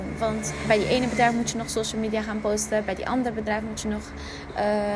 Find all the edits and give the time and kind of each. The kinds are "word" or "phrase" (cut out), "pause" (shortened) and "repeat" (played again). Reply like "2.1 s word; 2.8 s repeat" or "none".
none